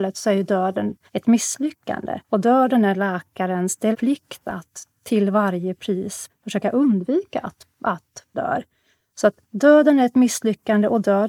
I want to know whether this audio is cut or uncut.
cut